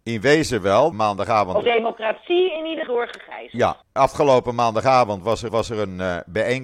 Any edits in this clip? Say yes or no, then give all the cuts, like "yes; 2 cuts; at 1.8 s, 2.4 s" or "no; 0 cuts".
yes; 5 cuts; at 0.9 s, 1.6 s, 2.9 s, 3.8 s, 5.5 s